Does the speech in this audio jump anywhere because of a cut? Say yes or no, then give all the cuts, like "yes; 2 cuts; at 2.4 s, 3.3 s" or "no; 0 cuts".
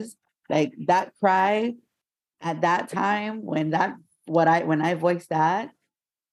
no; 0 cuts